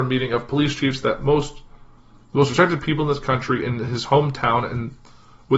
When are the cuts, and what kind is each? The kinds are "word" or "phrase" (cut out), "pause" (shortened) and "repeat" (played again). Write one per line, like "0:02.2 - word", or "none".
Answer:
none